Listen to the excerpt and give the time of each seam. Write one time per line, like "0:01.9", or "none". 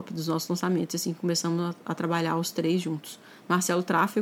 none

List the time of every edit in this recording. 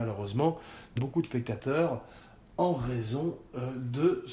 0:01.0

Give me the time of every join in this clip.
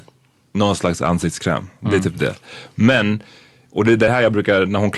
none

